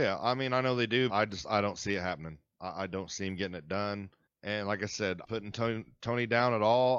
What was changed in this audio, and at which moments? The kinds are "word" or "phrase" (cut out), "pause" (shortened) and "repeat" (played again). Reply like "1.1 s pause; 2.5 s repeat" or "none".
1.1 s word; 4.3 s pause; 5.2 s phrase